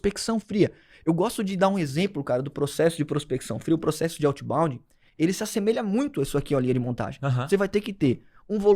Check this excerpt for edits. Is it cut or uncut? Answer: uncut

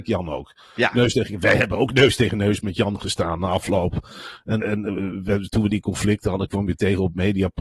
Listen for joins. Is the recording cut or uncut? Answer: cut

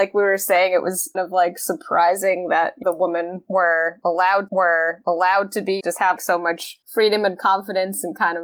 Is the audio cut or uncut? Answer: cut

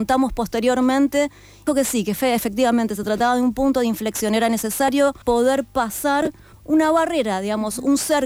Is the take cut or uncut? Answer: cut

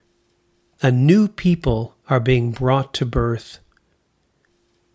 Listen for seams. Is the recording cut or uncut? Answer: cut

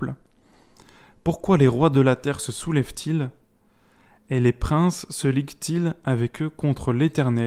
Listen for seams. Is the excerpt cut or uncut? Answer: uncut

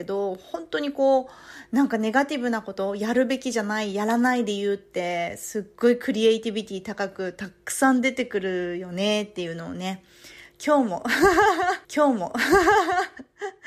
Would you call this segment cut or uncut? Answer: cut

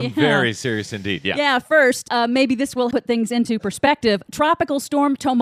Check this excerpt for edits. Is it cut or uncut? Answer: cut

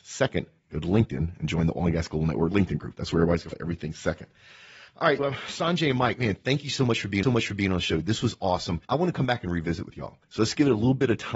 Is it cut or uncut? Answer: cut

